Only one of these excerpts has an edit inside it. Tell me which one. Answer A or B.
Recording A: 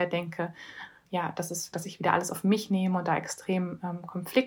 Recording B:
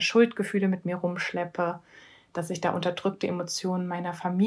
A